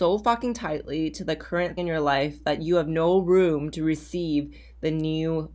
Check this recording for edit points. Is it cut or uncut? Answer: cut